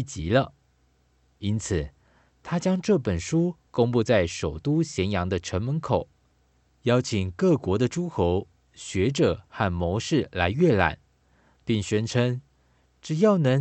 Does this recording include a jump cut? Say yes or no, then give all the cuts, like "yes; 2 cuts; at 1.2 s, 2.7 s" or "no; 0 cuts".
no; 0 cuts